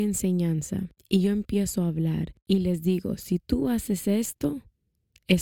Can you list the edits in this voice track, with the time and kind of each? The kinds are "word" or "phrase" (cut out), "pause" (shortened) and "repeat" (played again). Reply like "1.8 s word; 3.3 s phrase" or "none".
none